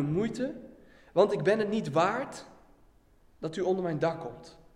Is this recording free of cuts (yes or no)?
yes